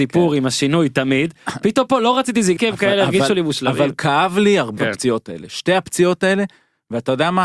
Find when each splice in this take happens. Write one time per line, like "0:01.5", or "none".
0:02.6
0:04.8